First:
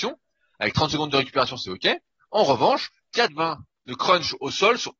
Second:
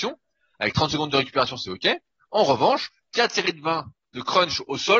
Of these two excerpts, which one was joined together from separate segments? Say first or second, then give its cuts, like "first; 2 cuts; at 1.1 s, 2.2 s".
first; 1 cut; at 3.3 s